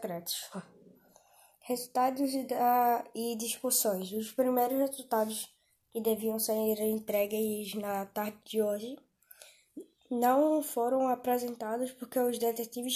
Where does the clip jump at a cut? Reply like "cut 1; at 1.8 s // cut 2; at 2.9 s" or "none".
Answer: none